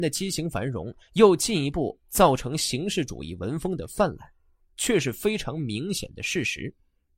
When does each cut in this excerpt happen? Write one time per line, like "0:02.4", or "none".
none